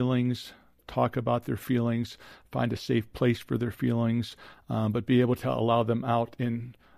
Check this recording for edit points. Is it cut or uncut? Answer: uncut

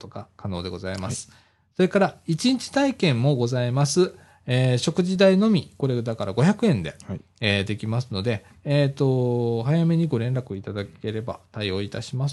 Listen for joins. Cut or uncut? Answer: uncut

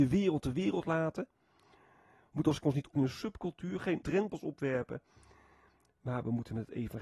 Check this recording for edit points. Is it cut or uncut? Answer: cut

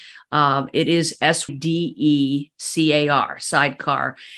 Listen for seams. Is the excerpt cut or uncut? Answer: cut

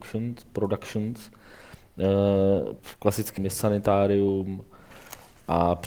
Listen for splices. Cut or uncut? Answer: cut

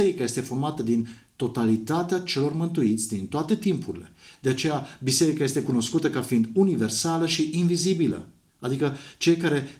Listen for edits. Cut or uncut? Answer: uncut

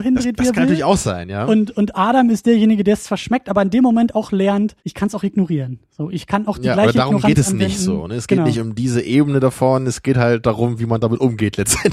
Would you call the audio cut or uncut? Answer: cut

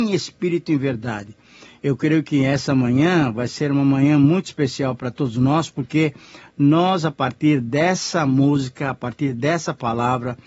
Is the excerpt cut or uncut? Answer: uncut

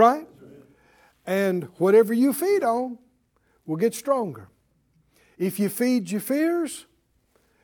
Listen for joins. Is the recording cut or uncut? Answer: uncut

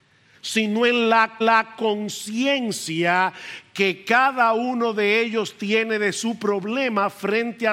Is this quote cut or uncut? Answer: cut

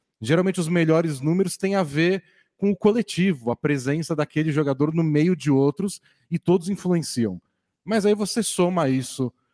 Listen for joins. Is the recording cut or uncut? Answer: uncut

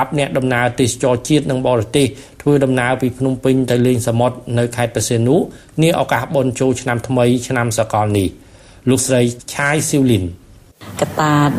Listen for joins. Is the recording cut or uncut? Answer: uncut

